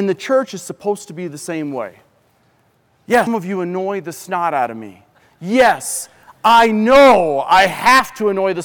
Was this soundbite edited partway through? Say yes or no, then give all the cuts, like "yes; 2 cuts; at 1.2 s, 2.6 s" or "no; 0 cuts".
yes; 1 cut; at 3.3 s